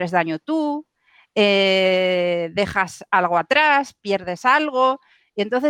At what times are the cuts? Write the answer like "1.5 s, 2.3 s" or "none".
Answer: none